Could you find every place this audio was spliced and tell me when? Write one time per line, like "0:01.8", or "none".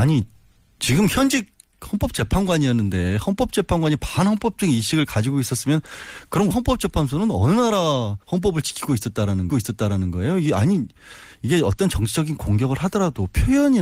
0:06.5
0:08.2
0:09.5